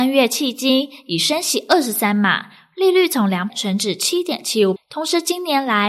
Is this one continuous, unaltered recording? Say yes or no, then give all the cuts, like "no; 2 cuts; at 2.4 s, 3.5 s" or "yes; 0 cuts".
no; 2 cuts; at 3.5 s, 4.8 s